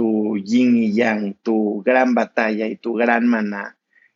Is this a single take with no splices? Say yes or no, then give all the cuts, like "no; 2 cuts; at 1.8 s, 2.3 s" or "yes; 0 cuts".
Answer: yes; 0 cuts